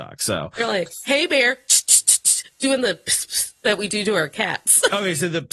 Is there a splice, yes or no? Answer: yes